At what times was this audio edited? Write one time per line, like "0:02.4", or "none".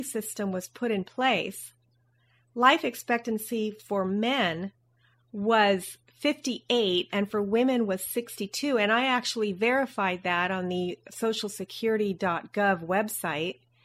none